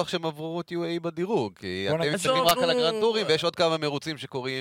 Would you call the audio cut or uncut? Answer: uncut